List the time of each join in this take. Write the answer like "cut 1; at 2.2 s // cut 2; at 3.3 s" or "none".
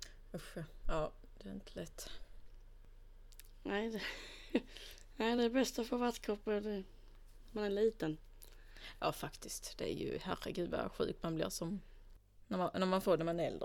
none